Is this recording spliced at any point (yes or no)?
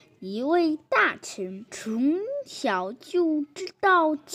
yes